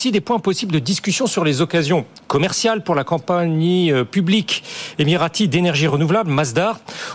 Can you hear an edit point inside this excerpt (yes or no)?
no